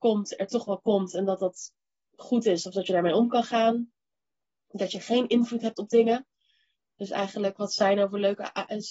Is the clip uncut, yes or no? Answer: yes